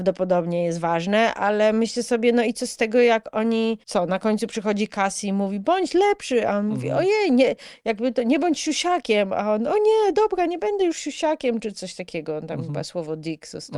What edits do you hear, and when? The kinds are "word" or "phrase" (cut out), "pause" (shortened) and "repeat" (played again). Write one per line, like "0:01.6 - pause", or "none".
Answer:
0:03.8 - pause